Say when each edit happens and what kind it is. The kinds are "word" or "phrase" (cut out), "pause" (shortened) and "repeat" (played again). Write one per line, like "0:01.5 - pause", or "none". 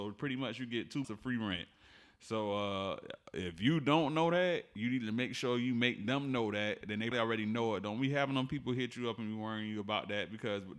0:01.0 - word
0:07.1 - word